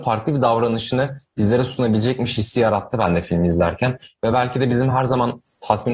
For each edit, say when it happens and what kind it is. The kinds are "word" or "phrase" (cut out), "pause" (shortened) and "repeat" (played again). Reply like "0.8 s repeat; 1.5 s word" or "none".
none